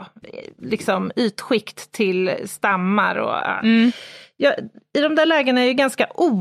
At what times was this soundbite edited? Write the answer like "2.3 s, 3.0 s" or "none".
none

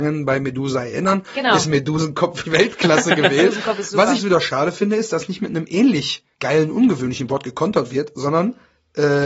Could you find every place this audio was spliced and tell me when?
2.4 s, 4.2 s, 6.3 s

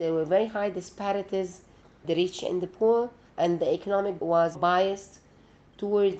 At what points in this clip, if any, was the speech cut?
2.0 s, 3.3 s, 4.2 s, 4.5 s

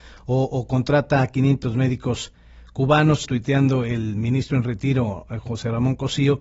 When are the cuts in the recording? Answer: 3.2 s

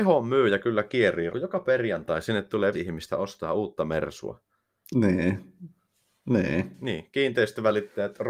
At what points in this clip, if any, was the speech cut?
1.3 s, 2.7 s

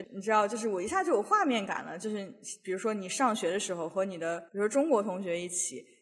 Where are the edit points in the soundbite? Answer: 4.5 s

